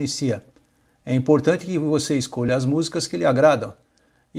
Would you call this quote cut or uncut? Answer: uncut